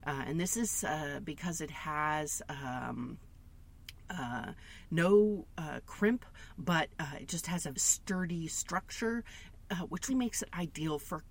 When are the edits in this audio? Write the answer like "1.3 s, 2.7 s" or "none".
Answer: 7.7 s, 10.1 s